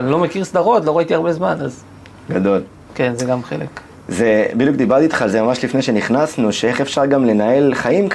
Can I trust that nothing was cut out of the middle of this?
yes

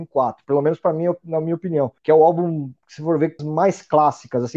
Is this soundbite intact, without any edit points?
no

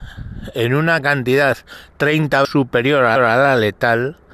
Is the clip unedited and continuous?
no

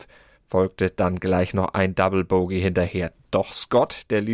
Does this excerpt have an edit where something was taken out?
no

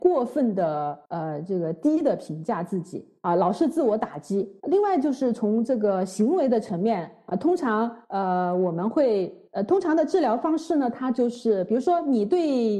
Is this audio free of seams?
no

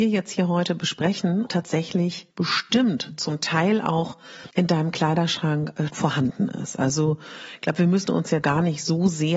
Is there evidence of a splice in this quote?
yes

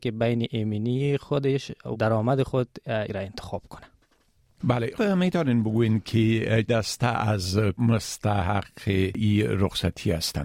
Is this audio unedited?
no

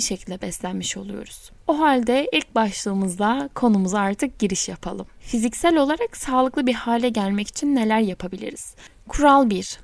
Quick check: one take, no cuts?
yes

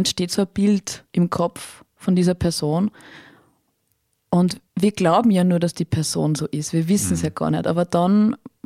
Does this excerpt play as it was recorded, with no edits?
no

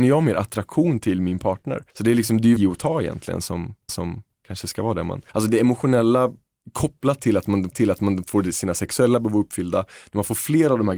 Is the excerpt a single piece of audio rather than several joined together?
no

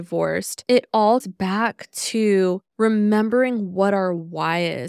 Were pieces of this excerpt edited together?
yes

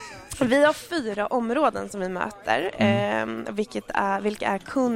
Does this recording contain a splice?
no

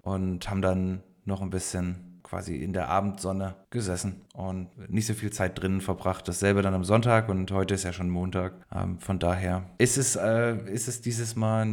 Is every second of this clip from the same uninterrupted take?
no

